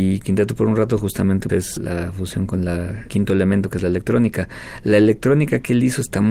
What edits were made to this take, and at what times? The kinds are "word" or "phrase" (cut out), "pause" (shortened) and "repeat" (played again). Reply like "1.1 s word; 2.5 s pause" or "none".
1.5 s word; 3.1 s word